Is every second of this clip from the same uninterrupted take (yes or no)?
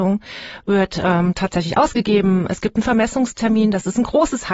yes